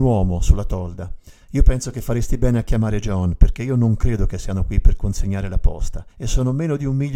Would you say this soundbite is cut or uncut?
cut